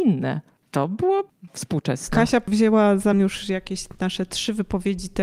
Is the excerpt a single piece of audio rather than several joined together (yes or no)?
no